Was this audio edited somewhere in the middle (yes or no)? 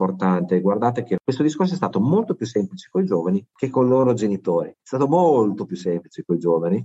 yes